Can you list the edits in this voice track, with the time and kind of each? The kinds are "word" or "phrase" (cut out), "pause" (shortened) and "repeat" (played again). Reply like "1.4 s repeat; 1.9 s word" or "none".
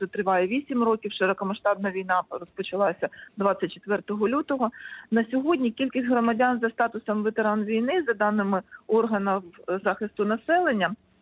9.8 s word

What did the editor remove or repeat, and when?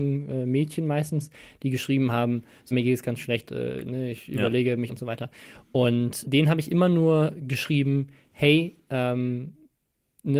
2.7 s word; 3.5 s word; 4.9 s word; 6.2 s word

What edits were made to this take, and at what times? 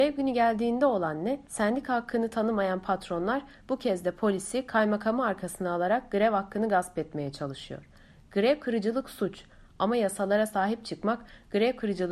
1.4 s pause

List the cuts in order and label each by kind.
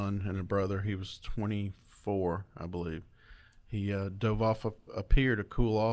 none

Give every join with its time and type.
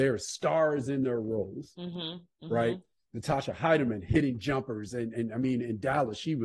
none

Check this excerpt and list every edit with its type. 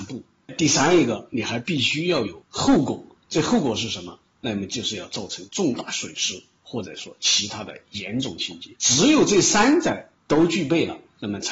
8.8 s pause

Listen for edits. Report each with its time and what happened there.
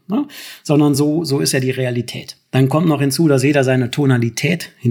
none

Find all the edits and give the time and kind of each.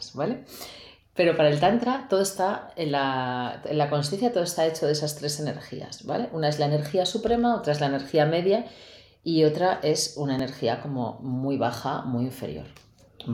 none

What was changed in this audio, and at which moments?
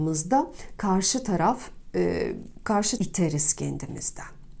3.0 s word

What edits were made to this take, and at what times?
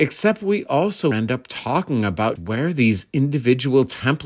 1.1 s word; 2.4 s word

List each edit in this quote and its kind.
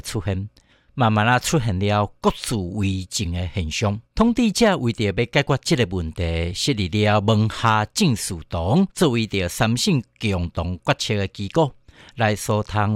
4.1 s pause; 8.9 s pause

